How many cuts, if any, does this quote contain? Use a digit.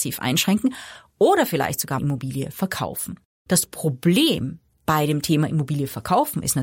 1